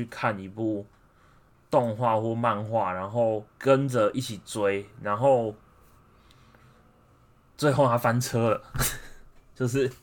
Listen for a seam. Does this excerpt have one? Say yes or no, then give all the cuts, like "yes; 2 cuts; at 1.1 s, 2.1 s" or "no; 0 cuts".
yes; 1 cut; at 3.5 s